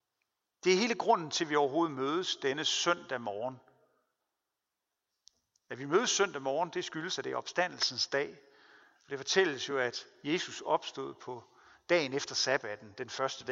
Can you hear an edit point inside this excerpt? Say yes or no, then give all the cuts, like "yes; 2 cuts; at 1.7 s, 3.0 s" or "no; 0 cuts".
no; 0 cuts